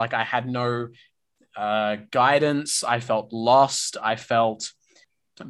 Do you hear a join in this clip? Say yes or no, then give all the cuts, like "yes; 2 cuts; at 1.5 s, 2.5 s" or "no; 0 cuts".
no; 0 cuts